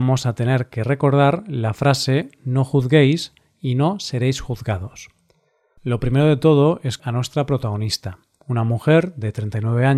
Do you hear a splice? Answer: yes; 1 cut; at 7.0 s

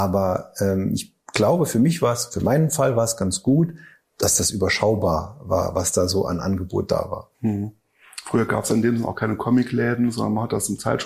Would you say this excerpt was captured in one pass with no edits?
no; 2 cuts; at 4.0 s, 7.3 s

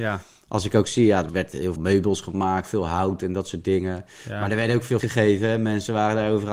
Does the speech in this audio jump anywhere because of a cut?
yes; 3 cuts; at 1.3 s, 1.8 s, 5.0 s

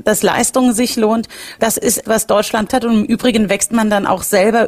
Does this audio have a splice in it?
yes; 3 cuts; at 1.6 s, 2.1 s, 2.7 s

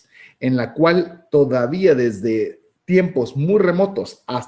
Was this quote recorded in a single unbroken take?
yes; 0 cuts

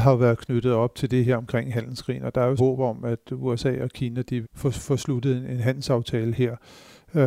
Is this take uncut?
no; 2 cuts; at 2.6 s, 4.4 s

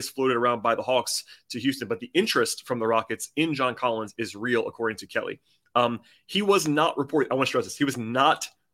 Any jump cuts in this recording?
no; 0 cuts

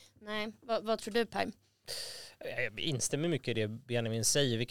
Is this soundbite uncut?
yes; 0 cuts

